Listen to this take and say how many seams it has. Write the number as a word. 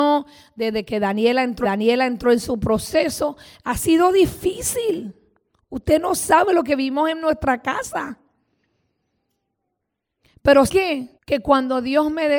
three